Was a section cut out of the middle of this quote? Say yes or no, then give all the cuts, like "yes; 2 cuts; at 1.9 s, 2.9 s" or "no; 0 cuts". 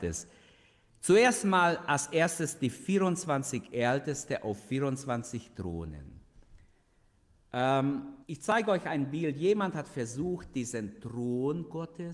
yes; 1 cut; at 8.2 s